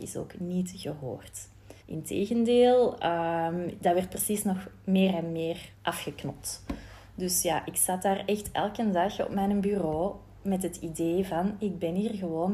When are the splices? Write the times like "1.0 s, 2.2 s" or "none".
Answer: 1.8 s, 5.7 s